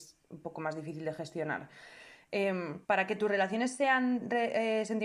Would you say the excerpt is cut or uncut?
cut